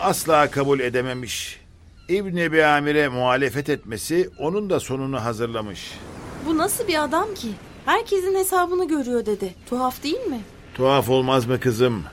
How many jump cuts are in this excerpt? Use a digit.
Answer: 1